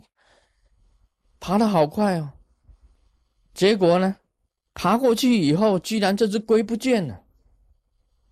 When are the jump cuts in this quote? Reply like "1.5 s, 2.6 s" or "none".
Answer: 4.5 s